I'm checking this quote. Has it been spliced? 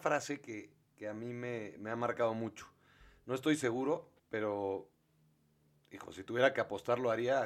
yes; 1 cut; at 4.2 s

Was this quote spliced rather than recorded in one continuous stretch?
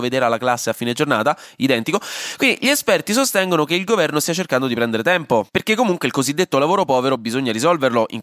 no; 0 cuts

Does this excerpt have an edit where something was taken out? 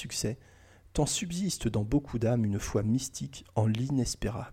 no; 0 cuts

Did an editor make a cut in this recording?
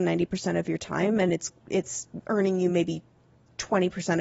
no; 0 cuts

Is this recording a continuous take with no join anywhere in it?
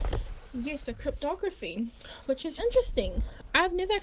no; 1 cut; at 2.6 s

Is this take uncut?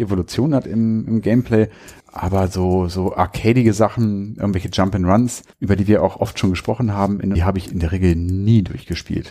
no; 3 cuts; at 2.0 s, 5.5 s, 7.4 s

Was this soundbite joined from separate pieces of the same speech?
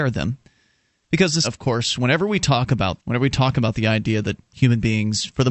yes; 2 cuts; at 1.4 s, 3.0 s

